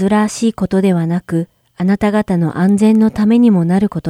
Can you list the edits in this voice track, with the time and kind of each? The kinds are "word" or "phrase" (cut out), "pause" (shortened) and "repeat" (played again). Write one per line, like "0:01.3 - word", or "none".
0:01.6 - pause